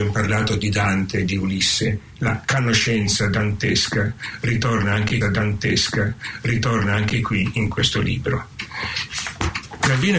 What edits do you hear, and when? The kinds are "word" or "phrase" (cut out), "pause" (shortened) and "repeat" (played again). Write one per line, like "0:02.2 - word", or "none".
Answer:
0:05.2 - repeat